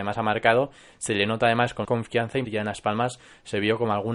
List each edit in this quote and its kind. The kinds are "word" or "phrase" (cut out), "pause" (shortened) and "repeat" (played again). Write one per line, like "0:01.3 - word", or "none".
0:01.8 - word
0:02.4 - phrase

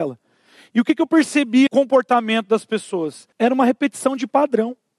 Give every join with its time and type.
0:01.7 - phrase
0:03.3 - pause

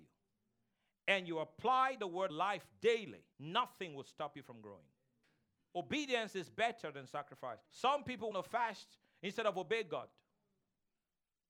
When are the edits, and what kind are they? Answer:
0:02.3 - phrase
0:03.3 - pause
0:05.2 - pause
0:07.7 - pause
0:08.3 - word

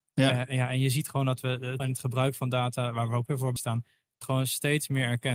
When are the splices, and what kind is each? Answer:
0:01.8 - word
0:03.3 - word
0:03.6 - word
0:04.2 - word

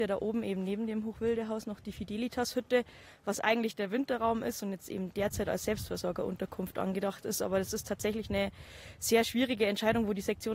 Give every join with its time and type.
none

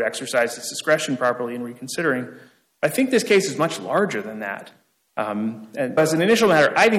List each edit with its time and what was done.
0:06.0 - word

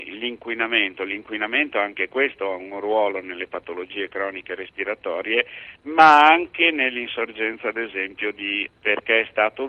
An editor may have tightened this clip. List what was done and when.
0:08.7 - word

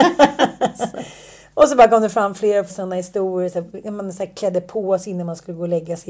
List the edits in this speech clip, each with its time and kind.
0:02.7 - word

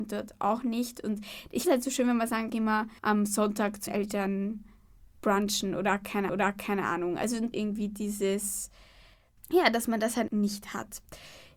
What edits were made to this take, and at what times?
0:01.6 - word
0:02.5 - phrase
0:03.0 - pause
0:03.9 - word
0:06.3 - repeat
0:07.5 - phrase
0:10.3 - word

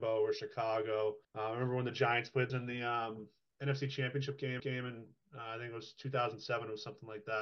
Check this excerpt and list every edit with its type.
0:01.2 - pause
0:02.5 - phrase
0:04.6 - repeat

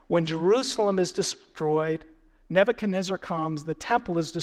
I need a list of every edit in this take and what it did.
none

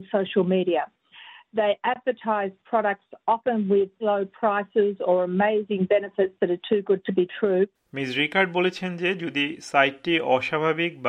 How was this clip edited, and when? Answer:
0:04.0 - word

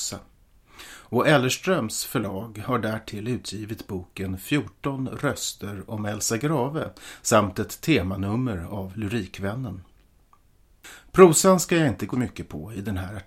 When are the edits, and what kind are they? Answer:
0:12.1 - phrase

